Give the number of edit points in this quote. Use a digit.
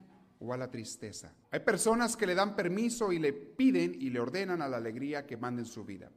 1